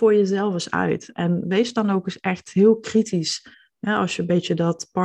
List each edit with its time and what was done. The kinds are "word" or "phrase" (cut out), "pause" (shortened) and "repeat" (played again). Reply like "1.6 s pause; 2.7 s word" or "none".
3.5 s pause